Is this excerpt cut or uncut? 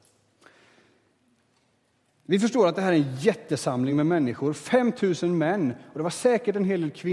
uncut